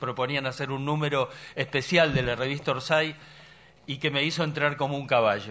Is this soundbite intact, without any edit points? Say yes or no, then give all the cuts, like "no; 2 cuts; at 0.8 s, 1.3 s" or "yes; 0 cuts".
no; 1 cut; at 3.8 s